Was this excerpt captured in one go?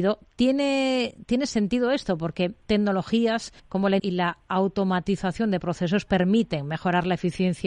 no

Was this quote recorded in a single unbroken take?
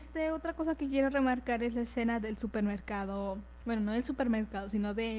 yes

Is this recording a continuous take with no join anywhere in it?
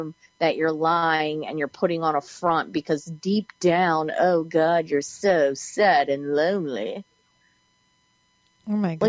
yes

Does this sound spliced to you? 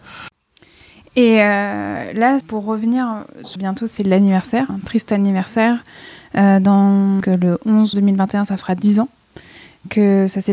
yes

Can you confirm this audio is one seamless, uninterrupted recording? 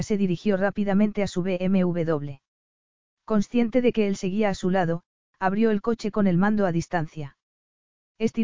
yes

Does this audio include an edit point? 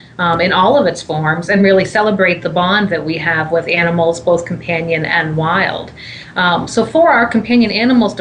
no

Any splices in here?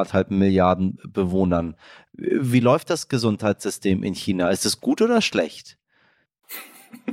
no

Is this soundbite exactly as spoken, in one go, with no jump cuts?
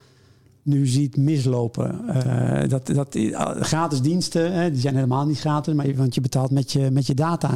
yes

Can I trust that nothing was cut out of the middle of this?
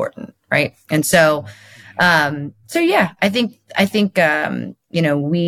no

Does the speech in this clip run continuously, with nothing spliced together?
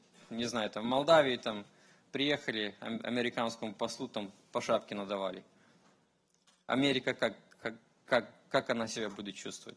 yes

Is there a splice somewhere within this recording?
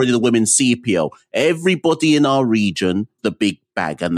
yes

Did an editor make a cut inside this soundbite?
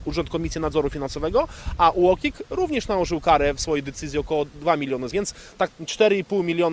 yes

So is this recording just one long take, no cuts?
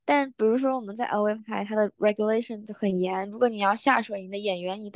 yes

